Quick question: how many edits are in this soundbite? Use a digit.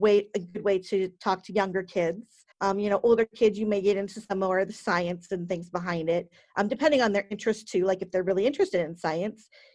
1